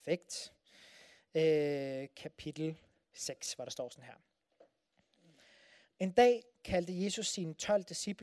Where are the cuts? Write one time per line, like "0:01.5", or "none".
none